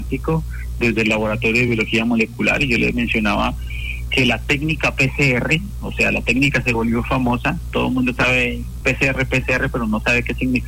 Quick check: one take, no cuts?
yes; 0 cuts

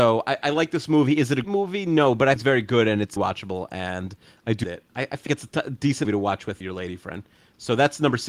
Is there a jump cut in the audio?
yes; 7 cuts; at 1.4 s, 2.4 s, 3.2 s, 4.6 s, 5.3 s, 6.0 s, 6.6 s

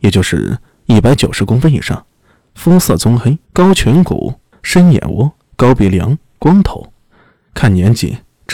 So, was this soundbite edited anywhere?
yes; 1 cut; at 3.4 s

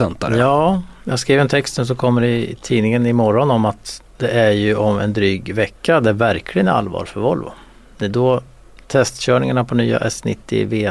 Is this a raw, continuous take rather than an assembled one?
yes; 0 cuts

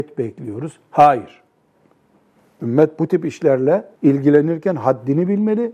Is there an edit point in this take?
yes; 1 cut; at 4.0 s

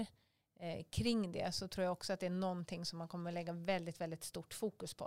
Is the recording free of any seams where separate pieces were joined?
yes; 0 cuts

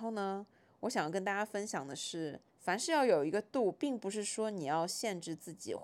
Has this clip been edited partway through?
yes; 1 cut; at 2.5 s

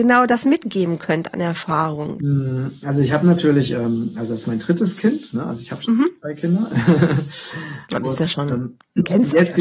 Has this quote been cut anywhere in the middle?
no; 0 cuts

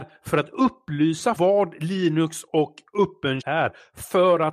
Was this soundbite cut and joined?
yes; 2 cuts; at 1.4 s, 3.4 s

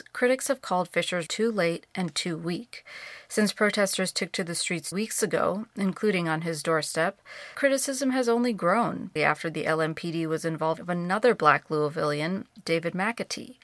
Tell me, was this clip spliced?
yes; 5 cuts; at 1.3 s, 4.9 s, 7.5 s, 9.2 s, 10.8 s

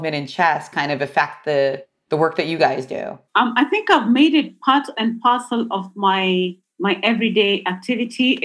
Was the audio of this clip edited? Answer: yes; 1 cut; at 3.3 s

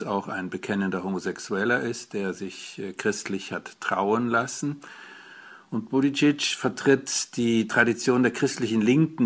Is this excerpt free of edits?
yes; 0 cuts

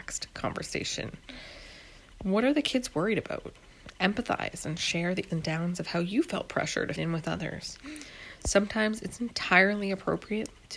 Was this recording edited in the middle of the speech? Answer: yes; 2 cuts; at 5.3 s, 7.0 s

